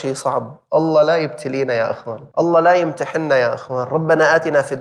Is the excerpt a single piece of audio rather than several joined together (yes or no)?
no